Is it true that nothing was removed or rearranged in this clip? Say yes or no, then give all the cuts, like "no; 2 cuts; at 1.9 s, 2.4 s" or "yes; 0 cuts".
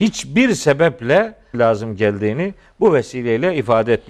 no; 1 cut; at 1.5 s